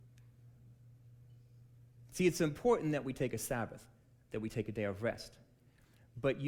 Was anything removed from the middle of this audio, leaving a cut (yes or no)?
no